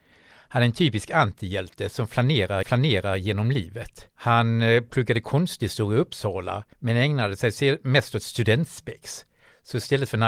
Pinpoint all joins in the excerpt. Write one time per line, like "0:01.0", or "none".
0:02.6
0:04.1
0:06.7